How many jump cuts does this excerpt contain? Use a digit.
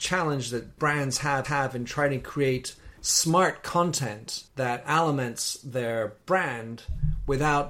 3